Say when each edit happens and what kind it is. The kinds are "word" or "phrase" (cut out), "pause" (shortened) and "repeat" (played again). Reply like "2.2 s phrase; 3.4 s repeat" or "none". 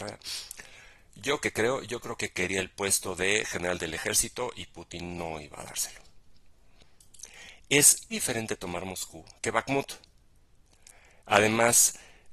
8.1 s word